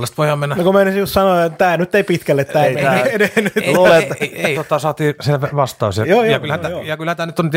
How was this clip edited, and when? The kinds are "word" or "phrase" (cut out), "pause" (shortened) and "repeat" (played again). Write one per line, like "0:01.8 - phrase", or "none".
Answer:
0:04.2 - word
0:04.5 - phrase
0:05.2 - word